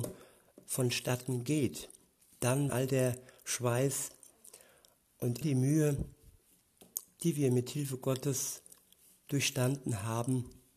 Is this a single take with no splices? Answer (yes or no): no